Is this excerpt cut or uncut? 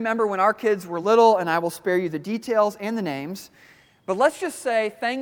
uncut